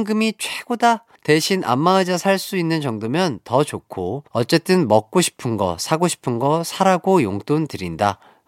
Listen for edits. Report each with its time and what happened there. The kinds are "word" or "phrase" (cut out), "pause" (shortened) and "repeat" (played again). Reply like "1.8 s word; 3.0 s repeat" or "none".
1.2 s pause; 4.3 s pause